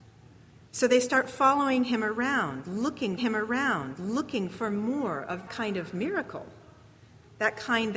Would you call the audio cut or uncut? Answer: cut